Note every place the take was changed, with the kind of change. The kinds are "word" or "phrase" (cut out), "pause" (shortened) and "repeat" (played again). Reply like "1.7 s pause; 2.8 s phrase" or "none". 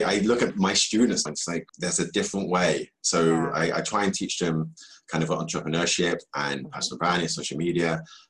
1.3 s word; 1.7 s pause